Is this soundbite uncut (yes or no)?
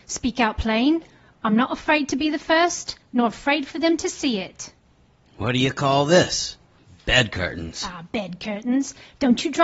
yes